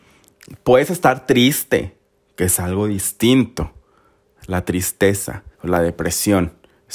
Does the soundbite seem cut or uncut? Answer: cut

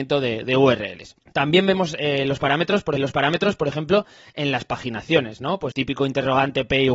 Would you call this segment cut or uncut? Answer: cut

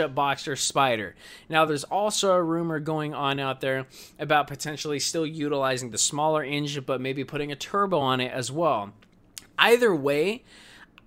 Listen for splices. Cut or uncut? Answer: uncut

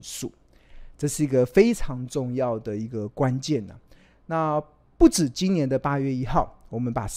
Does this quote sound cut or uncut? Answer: uncut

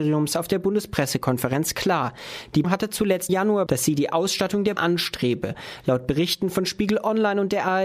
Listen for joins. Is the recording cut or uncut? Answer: cut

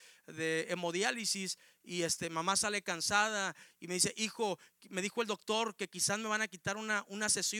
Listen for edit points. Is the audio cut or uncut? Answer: uncut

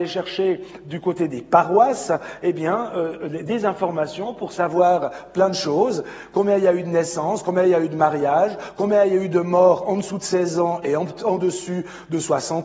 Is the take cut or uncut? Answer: uncut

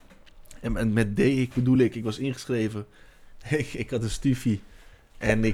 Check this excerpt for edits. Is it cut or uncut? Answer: uncut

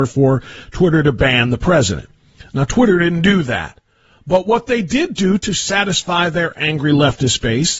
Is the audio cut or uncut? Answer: uncut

